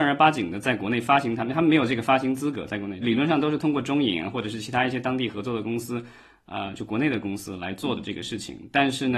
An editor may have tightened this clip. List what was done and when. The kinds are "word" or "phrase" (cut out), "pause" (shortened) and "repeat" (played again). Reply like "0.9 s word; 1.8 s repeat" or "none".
3.0 s word